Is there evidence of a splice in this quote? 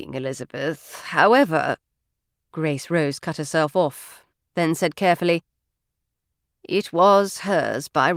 no; 0 cuts

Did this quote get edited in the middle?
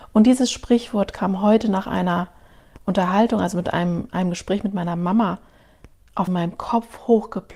yes; 1 cut; at 6.3 s

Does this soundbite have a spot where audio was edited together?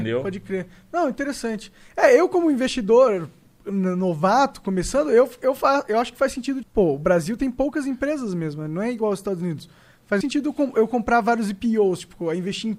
yes; 2 cuts; at 6.6 s, 10.2 s

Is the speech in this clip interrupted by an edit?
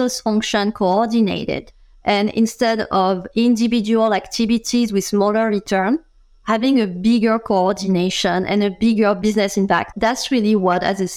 no; 0 cuts

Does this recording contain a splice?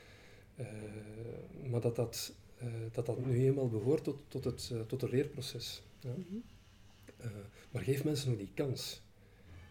no; 0 cuts

